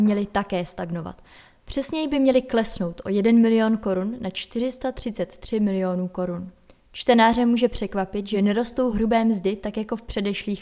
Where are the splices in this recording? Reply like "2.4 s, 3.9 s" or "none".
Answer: none